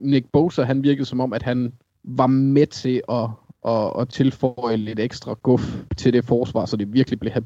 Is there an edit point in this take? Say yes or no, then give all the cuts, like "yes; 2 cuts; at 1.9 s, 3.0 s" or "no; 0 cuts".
yes; 2 cuts; at 1.9 s, 5.9 s